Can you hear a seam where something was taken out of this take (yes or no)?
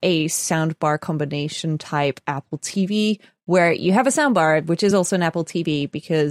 no